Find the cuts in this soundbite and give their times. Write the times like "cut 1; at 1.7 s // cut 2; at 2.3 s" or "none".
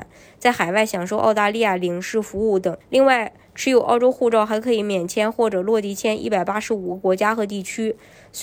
cut 1; at 2.8 s